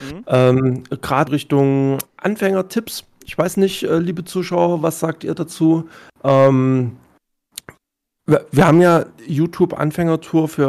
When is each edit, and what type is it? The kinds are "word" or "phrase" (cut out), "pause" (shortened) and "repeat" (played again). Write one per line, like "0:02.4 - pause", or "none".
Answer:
0:01.3 - word